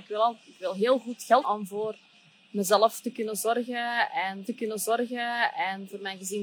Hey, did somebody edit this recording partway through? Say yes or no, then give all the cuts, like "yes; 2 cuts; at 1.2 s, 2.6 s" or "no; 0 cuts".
yes; 2 cuts; at 1.4 s, 4.5 s